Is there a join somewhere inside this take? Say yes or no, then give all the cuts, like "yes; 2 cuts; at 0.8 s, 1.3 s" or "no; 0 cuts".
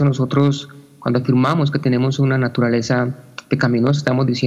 no; 0 cuts